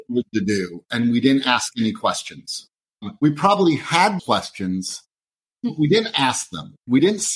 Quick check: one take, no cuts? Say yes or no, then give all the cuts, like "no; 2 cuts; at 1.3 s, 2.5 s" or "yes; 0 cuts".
no; 1 cut; at 4.2 s